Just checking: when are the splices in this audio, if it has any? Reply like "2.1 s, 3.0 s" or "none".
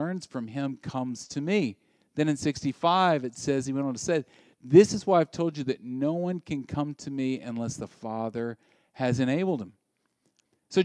none

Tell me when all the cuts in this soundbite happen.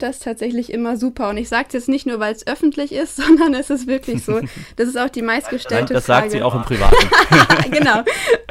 none

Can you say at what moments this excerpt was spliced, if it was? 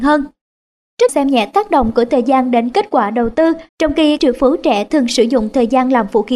1.1 s, 3.7 s, 4.2 s

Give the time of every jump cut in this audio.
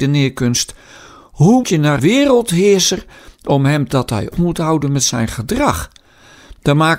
1.6 s, 2.0 s, 3.9 s, 4.3 s

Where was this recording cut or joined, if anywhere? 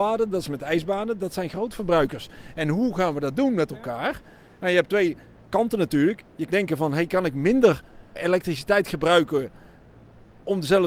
6.5 s, 8.1 s

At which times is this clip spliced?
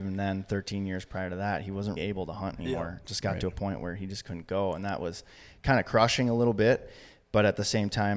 2.0 s

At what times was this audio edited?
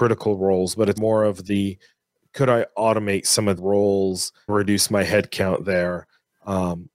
1.0 s, 3.6 s, 4.5 s

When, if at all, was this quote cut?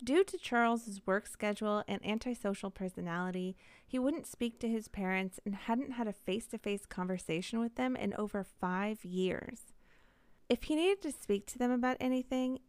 none

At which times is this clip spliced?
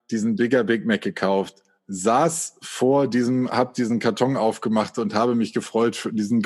none

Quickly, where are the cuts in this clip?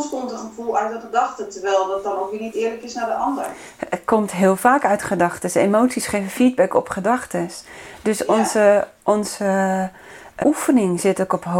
10.4 s

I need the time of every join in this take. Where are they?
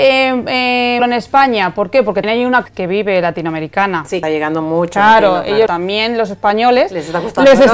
1.0 s, 2.2 s, 2.7 s, 4.2 s, 5.7 s

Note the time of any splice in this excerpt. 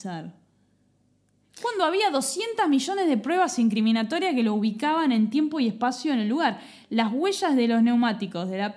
none

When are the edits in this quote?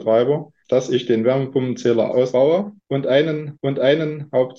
3.6 s

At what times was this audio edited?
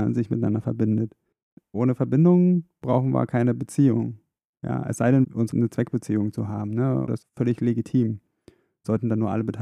5.5 s, 7.2 s

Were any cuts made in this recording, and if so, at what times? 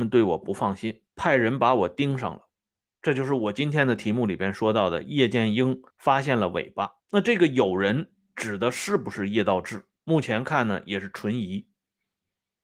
1.1 s, 2.5 s, 5.9 s, 7.0 s, 10.0 s

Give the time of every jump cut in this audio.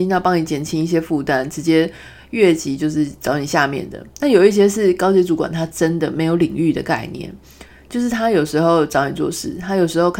none

